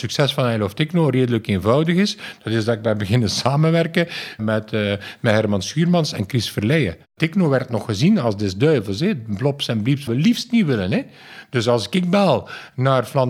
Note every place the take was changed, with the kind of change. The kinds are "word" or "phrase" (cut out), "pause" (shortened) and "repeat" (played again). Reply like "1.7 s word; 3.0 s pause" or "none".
4.4 s phrase; 10.1 s phrase